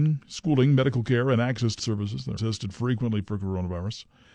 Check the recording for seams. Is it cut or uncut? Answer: cut